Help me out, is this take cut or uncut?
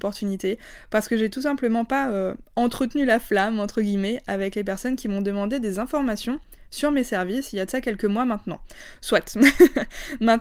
uncut